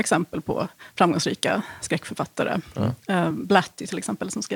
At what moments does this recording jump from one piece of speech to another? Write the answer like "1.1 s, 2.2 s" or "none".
none